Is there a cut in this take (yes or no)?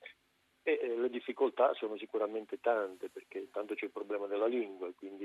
no